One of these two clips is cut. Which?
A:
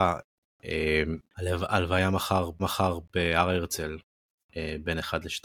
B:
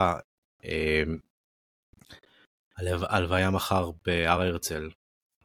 A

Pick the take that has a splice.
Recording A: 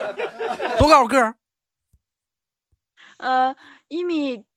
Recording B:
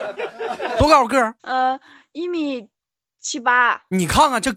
B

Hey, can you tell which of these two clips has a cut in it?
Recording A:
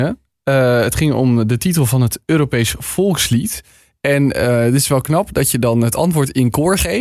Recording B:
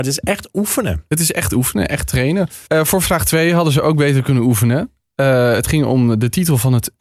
B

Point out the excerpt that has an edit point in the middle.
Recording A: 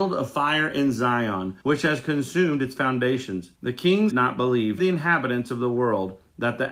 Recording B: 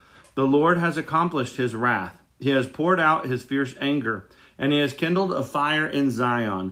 A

